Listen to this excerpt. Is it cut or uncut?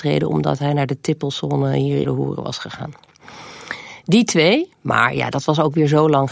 cut